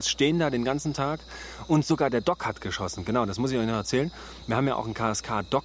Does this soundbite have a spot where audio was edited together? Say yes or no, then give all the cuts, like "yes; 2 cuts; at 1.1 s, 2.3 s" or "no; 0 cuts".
no; 0 cuts